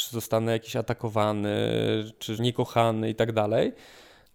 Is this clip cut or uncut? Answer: cut